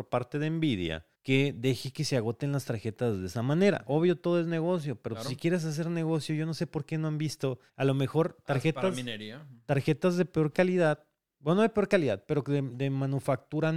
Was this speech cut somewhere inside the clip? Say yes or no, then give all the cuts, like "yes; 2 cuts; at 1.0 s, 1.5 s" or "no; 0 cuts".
yes; 2 cuts; at 1.1 s, 7.7 s